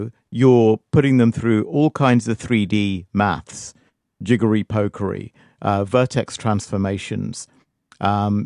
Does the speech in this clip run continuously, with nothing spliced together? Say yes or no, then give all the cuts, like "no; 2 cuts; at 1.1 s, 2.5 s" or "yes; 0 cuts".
yes; 0 cuts